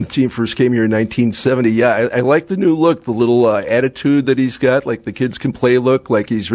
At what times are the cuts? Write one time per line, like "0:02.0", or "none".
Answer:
none